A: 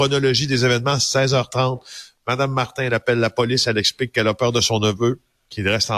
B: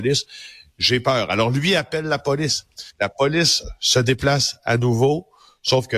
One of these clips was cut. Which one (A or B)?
B